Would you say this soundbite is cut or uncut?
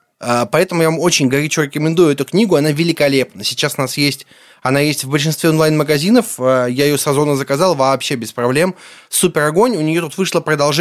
uncut